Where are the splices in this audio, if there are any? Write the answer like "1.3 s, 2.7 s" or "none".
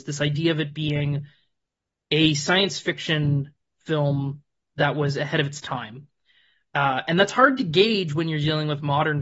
none